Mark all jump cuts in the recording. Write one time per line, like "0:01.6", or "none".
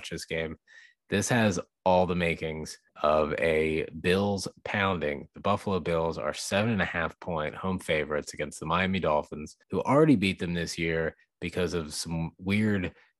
0:02.9
0:09.6